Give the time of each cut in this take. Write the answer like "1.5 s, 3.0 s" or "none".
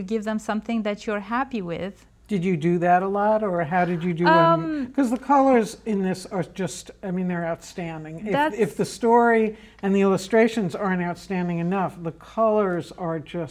2.2 s